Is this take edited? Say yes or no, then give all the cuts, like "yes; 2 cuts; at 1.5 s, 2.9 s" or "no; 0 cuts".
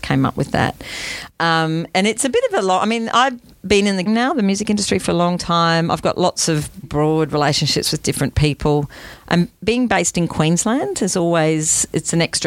yes; 2 cuts; at 4.1 s, 6.8 s